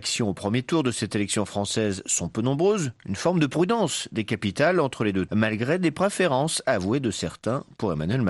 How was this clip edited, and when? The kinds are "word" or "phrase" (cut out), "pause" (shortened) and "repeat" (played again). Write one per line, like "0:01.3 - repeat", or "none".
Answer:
0:05.3 - word